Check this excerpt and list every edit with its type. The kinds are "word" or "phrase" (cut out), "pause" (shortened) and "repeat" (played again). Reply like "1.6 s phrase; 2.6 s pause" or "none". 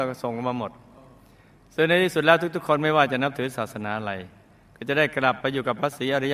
none